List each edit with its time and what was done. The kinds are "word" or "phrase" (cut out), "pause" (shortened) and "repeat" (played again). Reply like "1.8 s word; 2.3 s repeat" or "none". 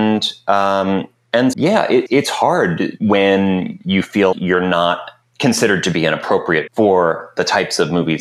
1.5 s word; 2.1 s word; 4.3 s word; 6.7 s word